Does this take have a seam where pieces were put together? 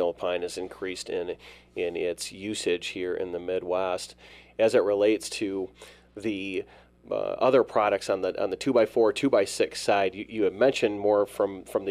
no; 0 cuts

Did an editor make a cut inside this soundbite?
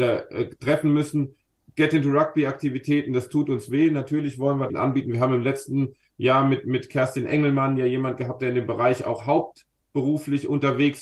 yes; 1 cut; at 4.7 s

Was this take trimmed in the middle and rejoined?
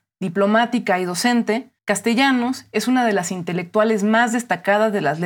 yes; 1 cut; at 1.8 s

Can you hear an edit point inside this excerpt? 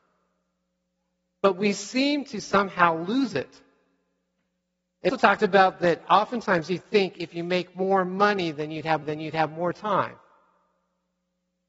yes; 2 cuts; at 5.1 s, 9.0 s

